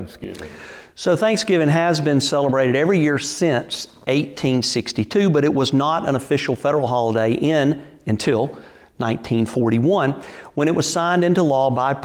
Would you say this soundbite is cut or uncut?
uncut